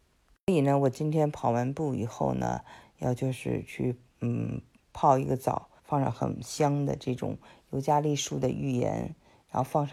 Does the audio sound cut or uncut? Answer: cut